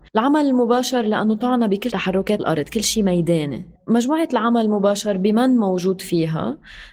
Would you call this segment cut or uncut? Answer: cut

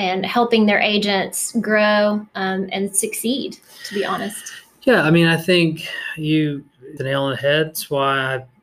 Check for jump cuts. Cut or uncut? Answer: cut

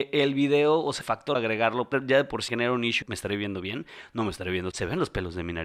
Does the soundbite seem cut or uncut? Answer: cut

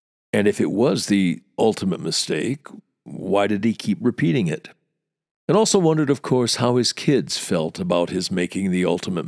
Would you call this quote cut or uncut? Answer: uncut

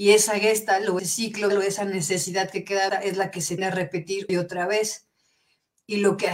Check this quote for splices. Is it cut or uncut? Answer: cut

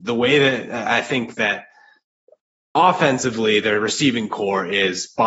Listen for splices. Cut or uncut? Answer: uncut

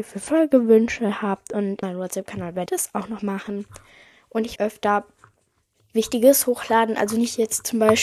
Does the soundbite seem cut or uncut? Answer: cut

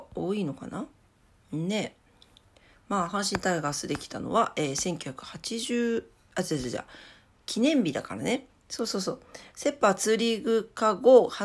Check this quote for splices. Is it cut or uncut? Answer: uncut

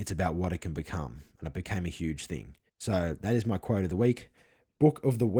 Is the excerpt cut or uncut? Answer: cut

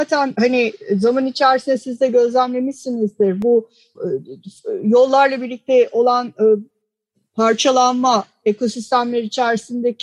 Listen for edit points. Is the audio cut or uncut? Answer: uncut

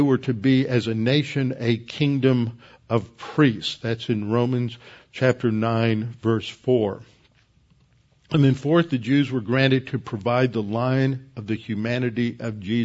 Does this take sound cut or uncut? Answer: uncut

